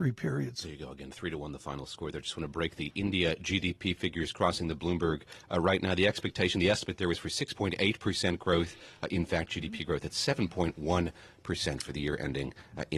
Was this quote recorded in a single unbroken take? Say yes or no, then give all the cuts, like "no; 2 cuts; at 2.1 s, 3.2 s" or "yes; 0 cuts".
yes; 0 cuts